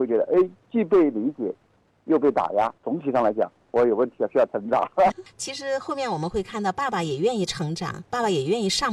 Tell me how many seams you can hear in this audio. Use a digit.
1